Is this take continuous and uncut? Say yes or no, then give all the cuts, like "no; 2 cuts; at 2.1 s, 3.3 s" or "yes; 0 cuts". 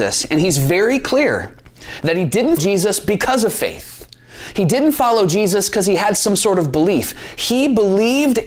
no; 1 cut; at 2.6 s